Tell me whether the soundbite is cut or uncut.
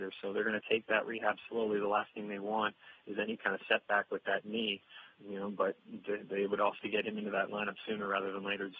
cut